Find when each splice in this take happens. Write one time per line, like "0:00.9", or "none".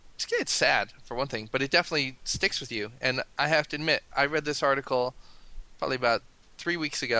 0:03.3